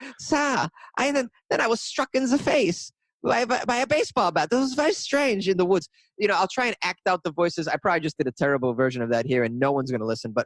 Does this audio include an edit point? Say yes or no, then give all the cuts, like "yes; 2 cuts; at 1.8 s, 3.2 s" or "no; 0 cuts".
no; 0 cuts